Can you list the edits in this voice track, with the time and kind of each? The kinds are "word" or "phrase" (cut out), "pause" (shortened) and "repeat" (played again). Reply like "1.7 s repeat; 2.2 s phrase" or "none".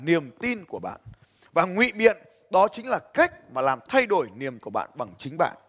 4.6 s word